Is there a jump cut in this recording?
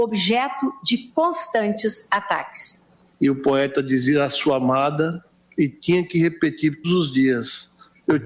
yes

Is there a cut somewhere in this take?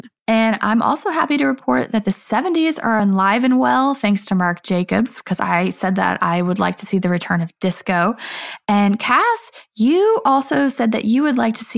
no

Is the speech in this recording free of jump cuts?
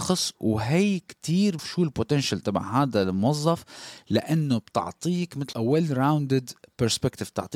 no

